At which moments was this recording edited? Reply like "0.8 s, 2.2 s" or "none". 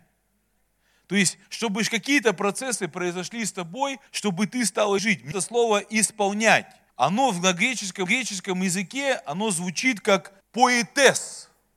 1.4 s, 4.1 s, 5.0 s, 5.3 s, 6.9 s, 8.1 s, 10.4 s